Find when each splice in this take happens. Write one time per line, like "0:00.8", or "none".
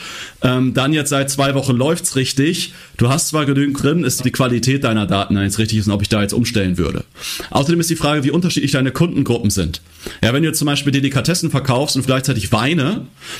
0:03.8
0:04.2
0:12.0

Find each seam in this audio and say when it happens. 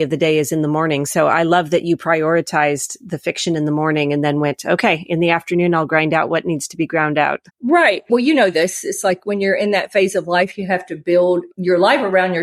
0:07.5

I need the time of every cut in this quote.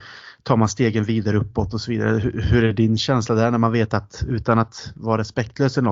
none

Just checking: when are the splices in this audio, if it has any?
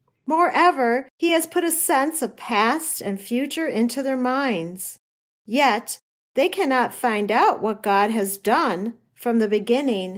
none

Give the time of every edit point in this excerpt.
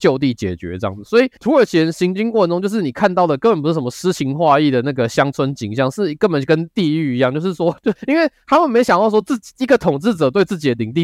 0:08.0

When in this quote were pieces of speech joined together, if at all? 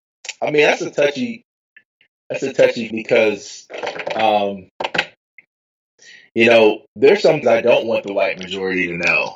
0:02.9
0:06.9
0:07.4

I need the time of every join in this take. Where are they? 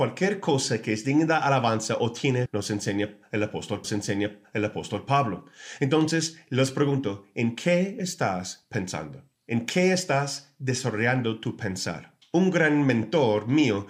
0:02.5
0:03.8
0:09.3
0:12.2

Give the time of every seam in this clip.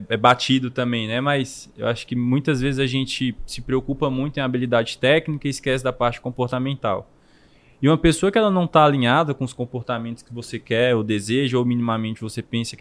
none

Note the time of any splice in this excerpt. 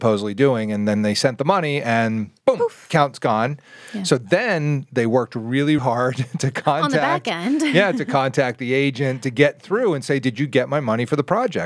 0:05.8

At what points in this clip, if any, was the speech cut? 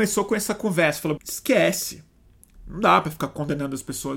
0:01.2

